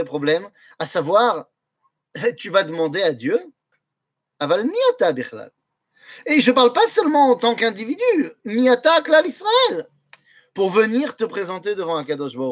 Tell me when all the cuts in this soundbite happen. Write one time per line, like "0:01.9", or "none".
none